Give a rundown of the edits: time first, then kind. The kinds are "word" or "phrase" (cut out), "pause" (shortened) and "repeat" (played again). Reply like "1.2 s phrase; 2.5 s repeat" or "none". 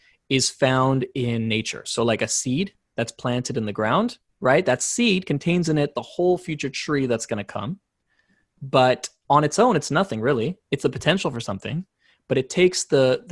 none

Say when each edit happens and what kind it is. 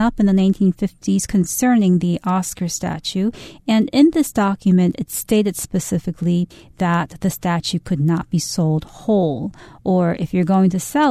none

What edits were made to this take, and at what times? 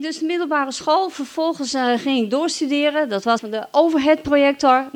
3.4 s phrase

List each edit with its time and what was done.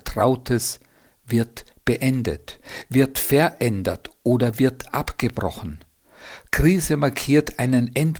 none

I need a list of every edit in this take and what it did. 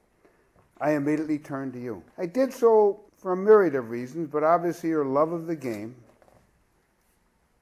2.1 s pause; 3.1 s pause

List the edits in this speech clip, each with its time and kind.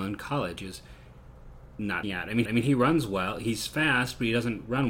2.0 s word; 2.4 s repeat

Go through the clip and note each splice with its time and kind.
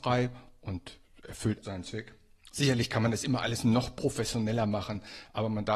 1.6 s word

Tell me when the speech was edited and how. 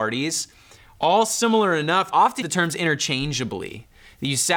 2.1 s phrase; 2.4 s word

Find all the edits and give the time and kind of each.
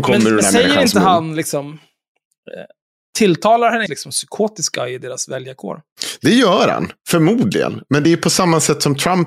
3.9 s phrase

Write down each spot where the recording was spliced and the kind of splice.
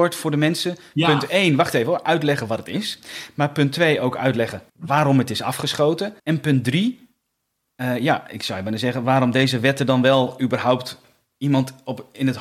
4.7 s pause; 6.2 s pause

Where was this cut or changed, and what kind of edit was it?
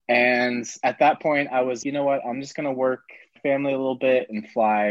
1.8 s word; 3.4 s word

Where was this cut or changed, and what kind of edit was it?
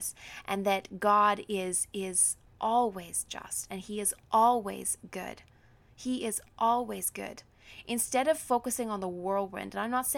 none

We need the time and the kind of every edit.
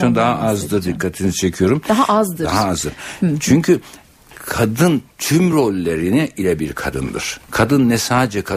none

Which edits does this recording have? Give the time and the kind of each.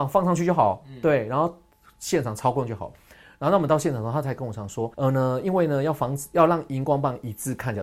4.9 s pause

